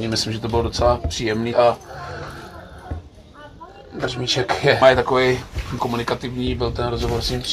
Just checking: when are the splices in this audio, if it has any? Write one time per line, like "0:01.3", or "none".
0:01.5
0:04.8
0:05.8